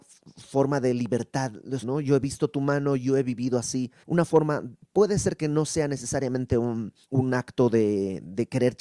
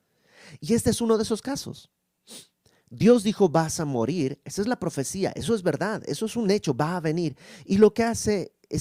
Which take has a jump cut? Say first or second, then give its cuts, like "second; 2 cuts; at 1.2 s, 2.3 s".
first; 3 cuts; at 1.8 s, 4.0 s, 7.0 s